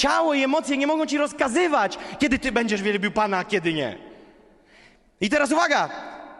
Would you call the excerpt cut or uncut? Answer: uncut